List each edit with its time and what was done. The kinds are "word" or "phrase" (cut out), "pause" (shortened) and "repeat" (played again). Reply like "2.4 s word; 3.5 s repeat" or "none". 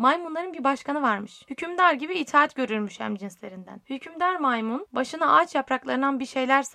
none